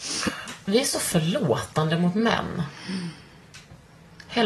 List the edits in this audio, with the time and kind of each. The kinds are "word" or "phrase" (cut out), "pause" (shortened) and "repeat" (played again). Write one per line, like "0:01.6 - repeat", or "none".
none

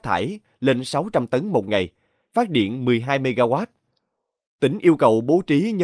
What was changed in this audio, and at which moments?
none

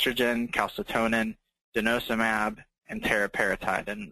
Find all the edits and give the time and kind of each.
none

